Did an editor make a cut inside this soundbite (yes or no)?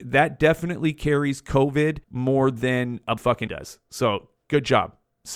yes